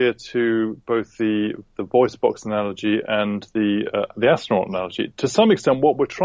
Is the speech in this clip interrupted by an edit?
no; 0 cuts

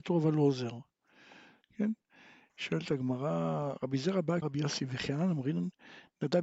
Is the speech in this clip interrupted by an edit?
yes; 1 cut; at 4.4 s

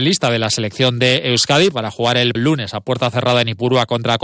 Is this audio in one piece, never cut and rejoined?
no; 1 cut; at 2.3 s

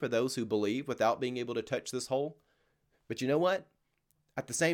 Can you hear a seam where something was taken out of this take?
no; 0 cuts

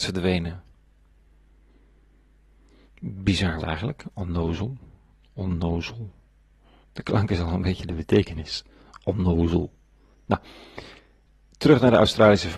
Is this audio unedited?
no; 1 cut; at 3.6 s

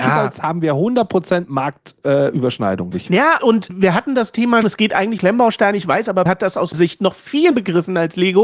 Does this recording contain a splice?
yes; 8 cuts; at 2.9 s, 3.4 s, 3.7 s, 4.6 s, 5.2 s, 6.3 s, 6.7 s, 7.5 s

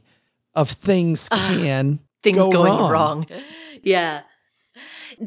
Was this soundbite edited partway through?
no; 0 cuts

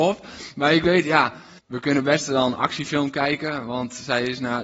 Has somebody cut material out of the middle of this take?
yes; 1 cut; at 1.6 s

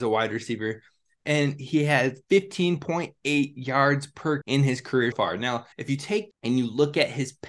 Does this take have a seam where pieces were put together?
yes; 5 cuts; at 2.2 s, 4.4 s, 5.1 s, 5.7 s, 6.3 s

